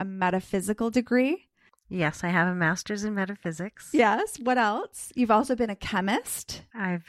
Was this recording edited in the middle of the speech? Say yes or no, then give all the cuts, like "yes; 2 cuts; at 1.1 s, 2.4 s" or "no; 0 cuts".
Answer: no; 0 cuts